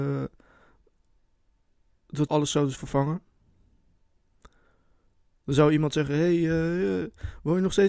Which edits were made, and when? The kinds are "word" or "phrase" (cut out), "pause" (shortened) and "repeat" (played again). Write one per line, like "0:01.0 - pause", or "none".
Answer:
0:02.3 - phrase